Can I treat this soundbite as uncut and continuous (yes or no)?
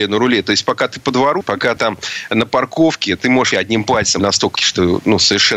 no